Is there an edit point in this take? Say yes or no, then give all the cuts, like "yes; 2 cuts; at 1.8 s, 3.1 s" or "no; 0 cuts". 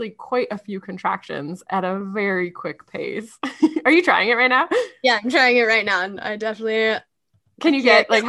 no; 0 cuts